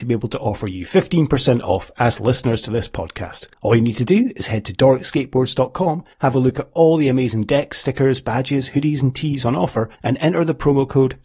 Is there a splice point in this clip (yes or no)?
yes